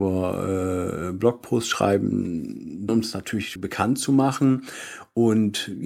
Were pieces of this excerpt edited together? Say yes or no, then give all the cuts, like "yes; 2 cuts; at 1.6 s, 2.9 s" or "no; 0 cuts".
yes; 2 cuts; at 2.9 s, 3.6 s